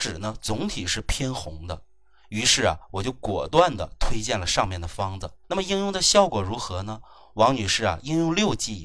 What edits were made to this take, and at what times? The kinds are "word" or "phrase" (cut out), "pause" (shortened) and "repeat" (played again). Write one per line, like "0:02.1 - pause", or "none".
0:05.4 - pause